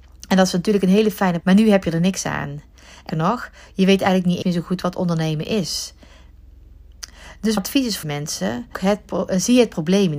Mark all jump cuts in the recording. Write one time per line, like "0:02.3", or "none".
0:01.4
0:03.1
0:04.4
0:07.6
0:08.0
0:08.7